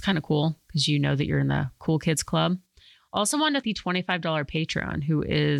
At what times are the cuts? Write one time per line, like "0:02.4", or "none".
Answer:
0:03.6